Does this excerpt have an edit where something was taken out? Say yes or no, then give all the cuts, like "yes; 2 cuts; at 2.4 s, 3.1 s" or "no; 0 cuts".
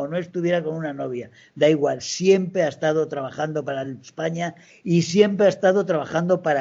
no; 0 cuts